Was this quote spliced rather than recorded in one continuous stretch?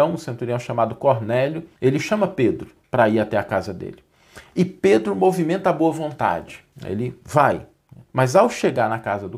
yes; 4 cuts; at 1.8 s, 2.8 s, 6.7 s, 8.1 s

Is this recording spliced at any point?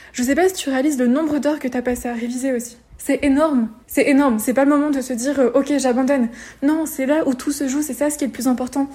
yes; 2 cuts; at 2.9 s, 3.8 s

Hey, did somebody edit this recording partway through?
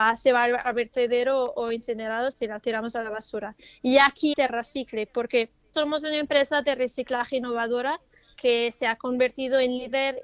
yes; 4 cuts; at 2.3 s, 4.3 s, 5.7 s, 8.4 s

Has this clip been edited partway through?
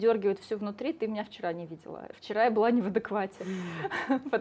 no; 0 cuts

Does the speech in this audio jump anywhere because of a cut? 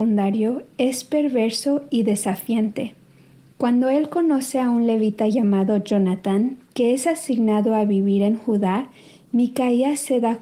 no; 0 cuts

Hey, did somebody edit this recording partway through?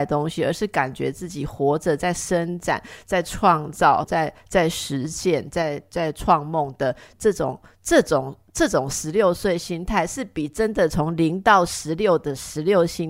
yes; 1 cut; at 4.0 s

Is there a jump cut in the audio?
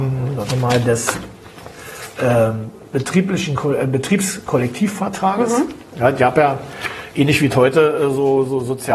no; 0 cuts

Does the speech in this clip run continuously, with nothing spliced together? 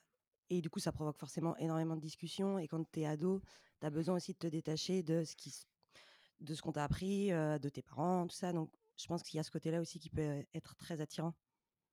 yes; 0 cuts

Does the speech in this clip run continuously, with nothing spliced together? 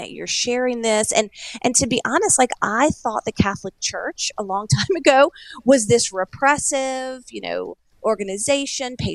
yes; 0 cuts

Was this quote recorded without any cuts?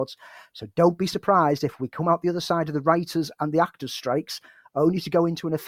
yes; 0 cuts

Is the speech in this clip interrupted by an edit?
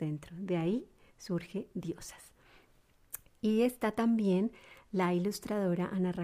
no; 0 cuts

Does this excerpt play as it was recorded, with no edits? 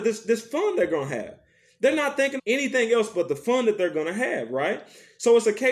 no; 1 cut; at 2.4 s

